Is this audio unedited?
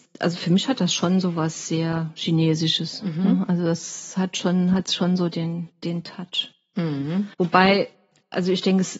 no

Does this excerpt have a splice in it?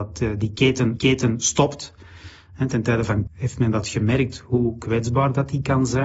yes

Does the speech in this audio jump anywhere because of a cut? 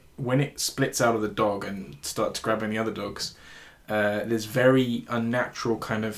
no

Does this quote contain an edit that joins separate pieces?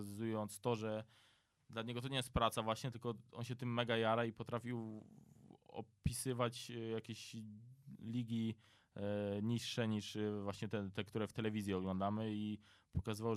no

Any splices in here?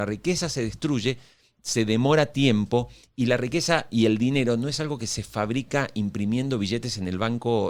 no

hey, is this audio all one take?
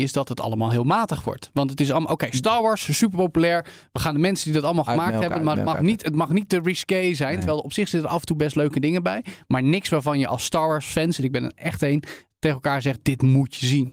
yes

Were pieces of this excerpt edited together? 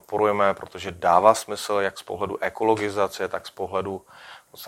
no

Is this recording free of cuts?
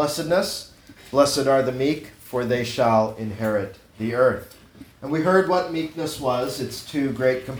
no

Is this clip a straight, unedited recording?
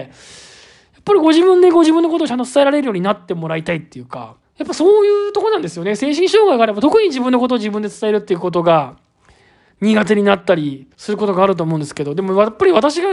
no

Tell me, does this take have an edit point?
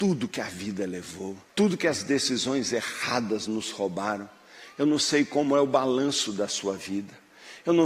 yes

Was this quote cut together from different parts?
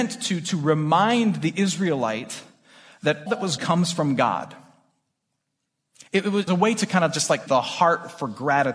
yes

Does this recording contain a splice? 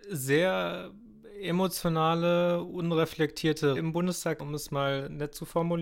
yes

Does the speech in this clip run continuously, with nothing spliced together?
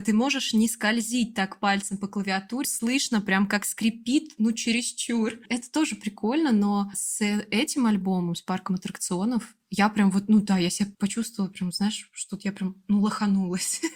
no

